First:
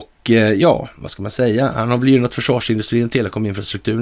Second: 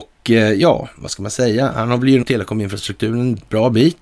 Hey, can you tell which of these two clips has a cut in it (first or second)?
second